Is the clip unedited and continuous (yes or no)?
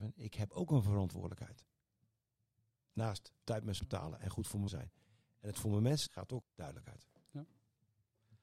no